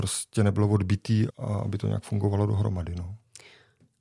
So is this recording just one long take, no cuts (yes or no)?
no